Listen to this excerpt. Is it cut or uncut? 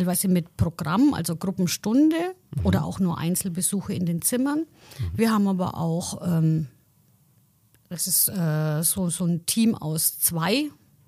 uncut